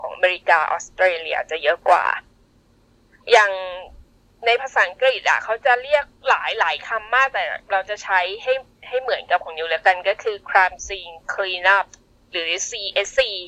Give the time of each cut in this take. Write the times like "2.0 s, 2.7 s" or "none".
none